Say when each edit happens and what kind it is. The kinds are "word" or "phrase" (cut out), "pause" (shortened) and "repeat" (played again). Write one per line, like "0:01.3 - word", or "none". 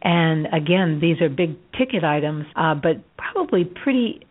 0:02.5 - pause
0:03.1 - pause